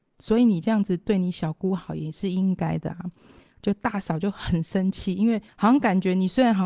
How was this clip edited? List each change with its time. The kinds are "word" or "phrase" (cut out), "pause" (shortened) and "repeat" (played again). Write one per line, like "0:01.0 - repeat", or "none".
0:05.5 - pause